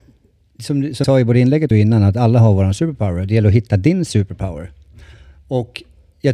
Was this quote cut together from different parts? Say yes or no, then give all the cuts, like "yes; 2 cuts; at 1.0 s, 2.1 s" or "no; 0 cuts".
yes; 2 cuts; at 1.0 s, 1.7 s